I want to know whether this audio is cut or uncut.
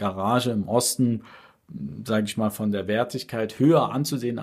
uncut